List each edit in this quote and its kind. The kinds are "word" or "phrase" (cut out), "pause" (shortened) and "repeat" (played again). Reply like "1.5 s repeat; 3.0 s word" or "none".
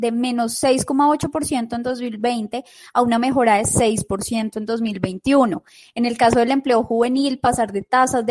none